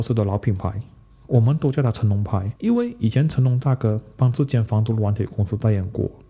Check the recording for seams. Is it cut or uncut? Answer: cut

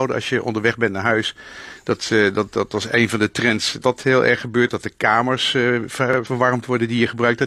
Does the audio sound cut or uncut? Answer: cut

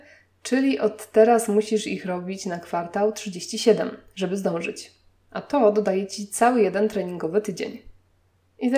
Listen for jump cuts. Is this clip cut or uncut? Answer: uncut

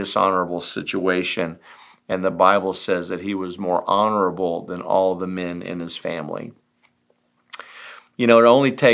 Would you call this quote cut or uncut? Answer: uncut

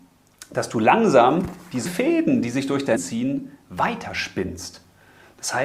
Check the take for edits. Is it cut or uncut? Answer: cut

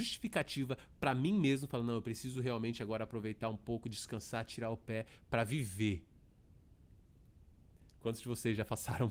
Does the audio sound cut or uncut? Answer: uncut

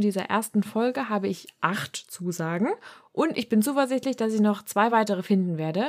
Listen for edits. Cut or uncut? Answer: uncut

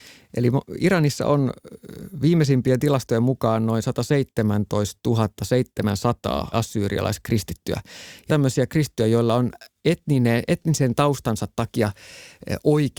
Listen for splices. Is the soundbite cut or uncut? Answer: cut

